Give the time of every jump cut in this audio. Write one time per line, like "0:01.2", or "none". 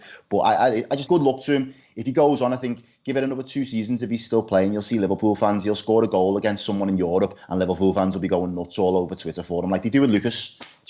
0:01.1